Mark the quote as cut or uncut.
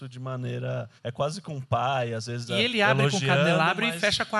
cut